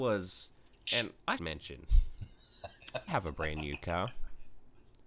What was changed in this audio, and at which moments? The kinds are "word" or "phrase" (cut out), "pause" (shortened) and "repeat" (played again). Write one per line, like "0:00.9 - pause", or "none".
0:01.4 - word
0:03.1 - word

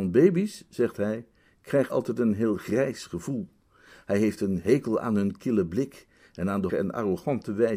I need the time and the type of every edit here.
0:01.9 - word
0:06.7 - word

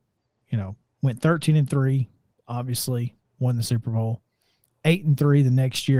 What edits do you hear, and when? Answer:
0:03.2 - pause

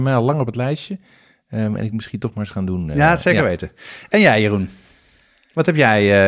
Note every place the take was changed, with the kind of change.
0:01.9 - word

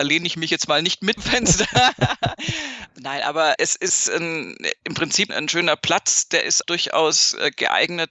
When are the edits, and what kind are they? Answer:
0:01.2 - phrase
0:03.6 - word
0:05.3 - word
0:06.6 - word

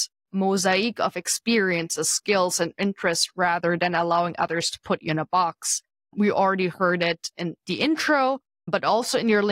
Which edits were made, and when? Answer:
none

